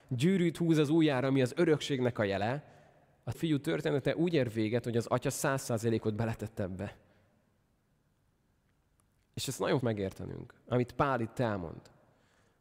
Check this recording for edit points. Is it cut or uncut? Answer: cut